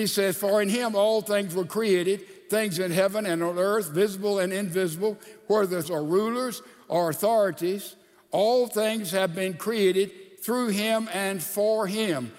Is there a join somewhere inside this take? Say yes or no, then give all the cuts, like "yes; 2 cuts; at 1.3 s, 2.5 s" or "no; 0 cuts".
yes; 1 cut; at 5.8 s